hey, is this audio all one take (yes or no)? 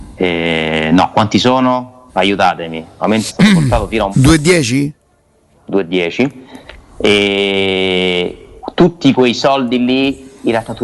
no